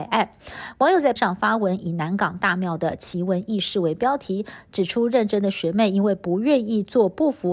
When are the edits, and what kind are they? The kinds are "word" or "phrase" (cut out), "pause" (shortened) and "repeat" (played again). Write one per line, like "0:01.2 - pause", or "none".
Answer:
0:01.2 - word